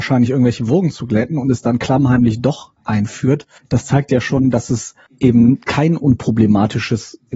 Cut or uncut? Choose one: uncut